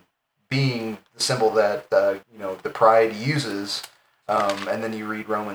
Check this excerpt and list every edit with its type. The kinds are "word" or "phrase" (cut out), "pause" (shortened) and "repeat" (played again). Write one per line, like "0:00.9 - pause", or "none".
0:01.1 - pause
0:02.2 - pause